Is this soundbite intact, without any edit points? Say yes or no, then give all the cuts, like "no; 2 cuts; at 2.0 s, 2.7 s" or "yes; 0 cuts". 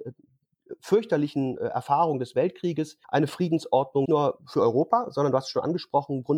no; 3 cuts; at 1.6 s, 3.0 s, 4.0 s